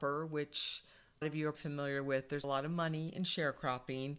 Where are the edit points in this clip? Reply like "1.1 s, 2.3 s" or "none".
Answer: 1.2 s, 1.5 s, 2.4 s

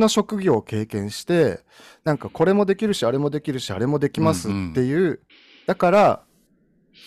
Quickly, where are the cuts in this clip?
5.3 s

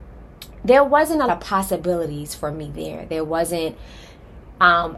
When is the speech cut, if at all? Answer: 1.3 s

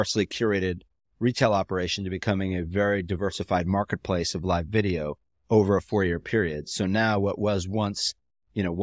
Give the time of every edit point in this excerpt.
none

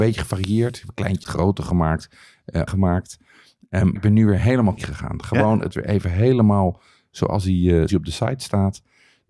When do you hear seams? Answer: 1.2 s, 2.7 s, 4.0 s, 4.8 s, 5.7 s, 7.9 s

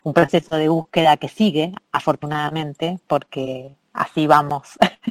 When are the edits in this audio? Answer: none

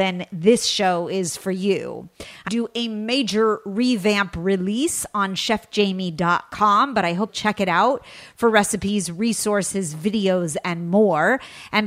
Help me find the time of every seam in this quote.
2.5 s, 7.3 s

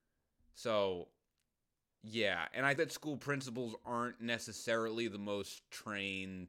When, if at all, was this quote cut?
2.8 s

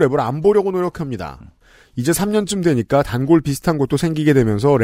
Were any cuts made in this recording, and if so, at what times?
none

